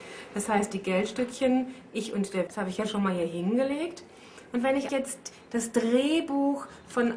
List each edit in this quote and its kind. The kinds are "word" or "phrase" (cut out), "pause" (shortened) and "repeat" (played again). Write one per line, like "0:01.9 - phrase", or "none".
0:02.5 - word
0:04.9 - word